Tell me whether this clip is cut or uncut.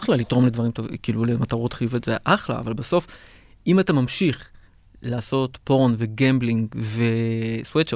uncut